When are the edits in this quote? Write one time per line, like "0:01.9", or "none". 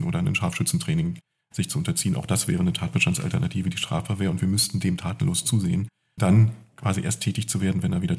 0:06.2